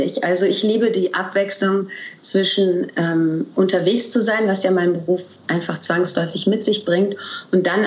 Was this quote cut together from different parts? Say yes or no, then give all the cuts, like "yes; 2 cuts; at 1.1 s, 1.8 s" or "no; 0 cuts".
no; 0 cuts